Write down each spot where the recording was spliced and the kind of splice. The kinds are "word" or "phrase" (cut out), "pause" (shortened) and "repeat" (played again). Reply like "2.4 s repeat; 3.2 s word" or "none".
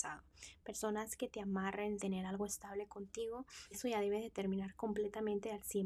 2.0 s word; 3.7 s word